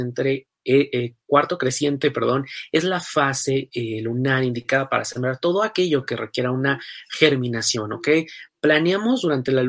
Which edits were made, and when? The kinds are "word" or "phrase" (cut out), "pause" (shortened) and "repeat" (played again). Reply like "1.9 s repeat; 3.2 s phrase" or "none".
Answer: none